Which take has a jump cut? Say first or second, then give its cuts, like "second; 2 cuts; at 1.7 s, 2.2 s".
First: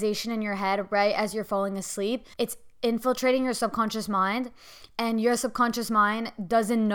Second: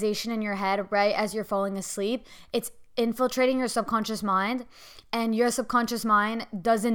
first; 1 cut; at 2.3 s